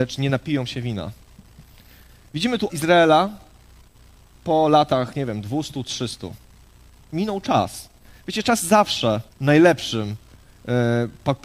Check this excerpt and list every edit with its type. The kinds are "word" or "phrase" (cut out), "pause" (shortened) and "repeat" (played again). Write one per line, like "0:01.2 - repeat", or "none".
0:02.7 - word
0:08.6 - word
0:09.3 - pause